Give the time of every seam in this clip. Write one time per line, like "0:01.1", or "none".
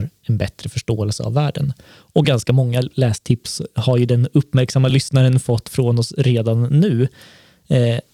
none